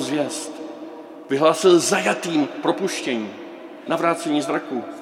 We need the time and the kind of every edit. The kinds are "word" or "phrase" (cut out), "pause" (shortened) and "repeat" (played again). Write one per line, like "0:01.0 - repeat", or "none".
0:03.9 - word